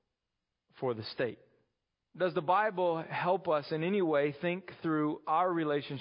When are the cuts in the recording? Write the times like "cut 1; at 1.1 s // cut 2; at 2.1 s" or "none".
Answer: cut 1; at 1.9 s

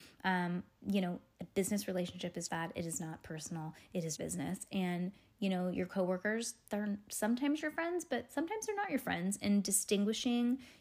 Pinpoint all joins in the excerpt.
cut 1; at 2.5 s // cut 2; at 4.2 s

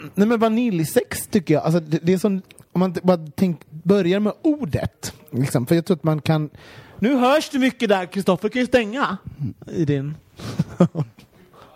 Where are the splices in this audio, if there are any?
none

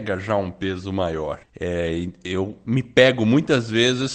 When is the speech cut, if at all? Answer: cut 1; at 1.4 s

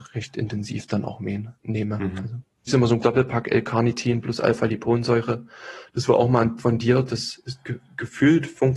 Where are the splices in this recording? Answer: cut 1; at 2.7 s // cut 2; at 3.0 s // cut 3; at 6.6 s

